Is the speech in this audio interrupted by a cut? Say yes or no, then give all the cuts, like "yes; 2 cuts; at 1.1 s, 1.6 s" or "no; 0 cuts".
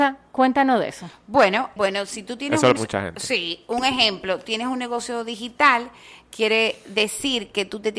yes; 2 cuts; at 1.8 s, 2.8 s